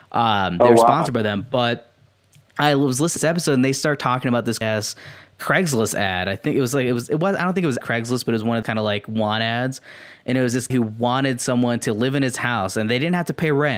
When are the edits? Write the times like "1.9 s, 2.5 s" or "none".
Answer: 3.2 s, 4.6 s, 7.8 s, 8.6 s, 10.7 s